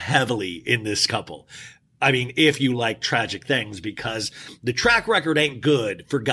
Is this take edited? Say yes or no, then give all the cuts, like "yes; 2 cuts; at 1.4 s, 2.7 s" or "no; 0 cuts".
no; 0 cuts